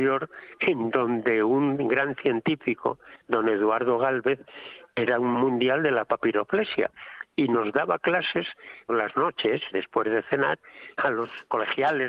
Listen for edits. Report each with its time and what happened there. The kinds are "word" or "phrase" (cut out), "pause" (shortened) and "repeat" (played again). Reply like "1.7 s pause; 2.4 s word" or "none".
3.2 s pause; 5.3 s word; 8.9 s word; 9.7 s word; 11.0 s word